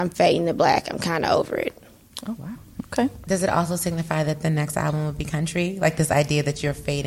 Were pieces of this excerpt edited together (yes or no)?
no